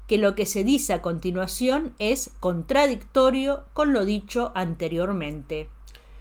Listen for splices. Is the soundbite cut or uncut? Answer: uncut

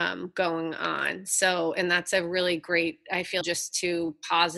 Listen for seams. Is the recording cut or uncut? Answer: cut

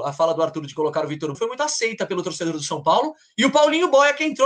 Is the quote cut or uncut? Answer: cut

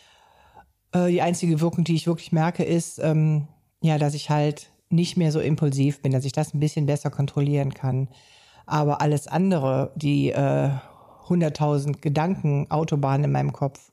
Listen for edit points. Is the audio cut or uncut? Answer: uncut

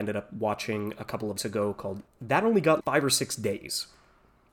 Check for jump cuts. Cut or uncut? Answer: cut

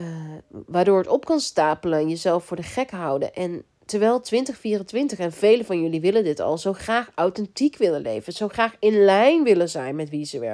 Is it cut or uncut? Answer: uncut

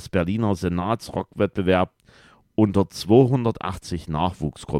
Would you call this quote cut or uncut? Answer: uncut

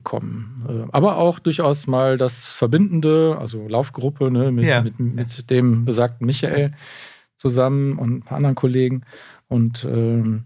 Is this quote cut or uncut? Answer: uncut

